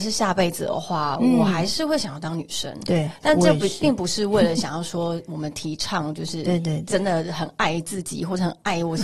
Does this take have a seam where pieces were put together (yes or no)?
no